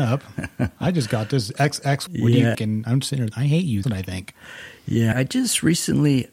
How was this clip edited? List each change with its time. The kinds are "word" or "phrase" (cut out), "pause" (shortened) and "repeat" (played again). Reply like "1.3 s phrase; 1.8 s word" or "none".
2.1 s word; 2.5 s word; 3.3 s word; 3.8 s word; 5.1 s word